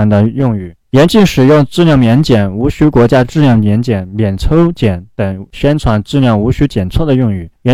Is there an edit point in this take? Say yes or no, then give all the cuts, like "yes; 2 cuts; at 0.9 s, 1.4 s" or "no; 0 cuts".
no; 0 cuts